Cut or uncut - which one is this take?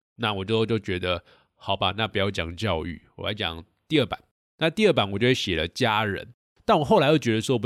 uncut